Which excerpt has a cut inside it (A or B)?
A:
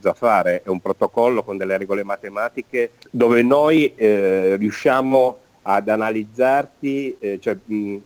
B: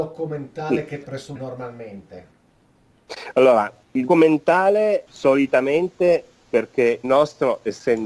B